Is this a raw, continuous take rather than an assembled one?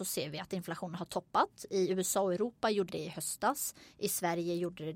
no; 1 cut; at 2.9 s

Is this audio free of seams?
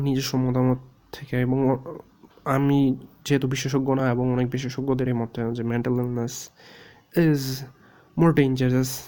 yes; 0 cuts

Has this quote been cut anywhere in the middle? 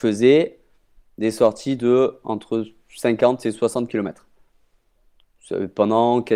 no; 0 cuts

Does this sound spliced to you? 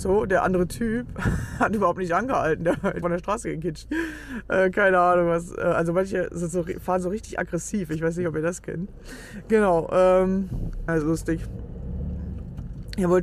yes; 3 cuts; at 3.0 s, 3.9 s, 10.9 s

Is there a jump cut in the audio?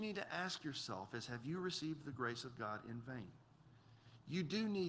no; 0 cuts

